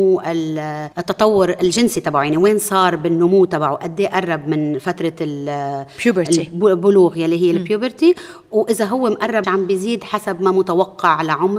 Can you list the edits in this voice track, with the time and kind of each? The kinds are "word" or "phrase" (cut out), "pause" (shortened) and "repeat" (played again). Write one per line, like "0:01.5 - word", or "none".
0:00.9 - pause
0:09.4 - phrase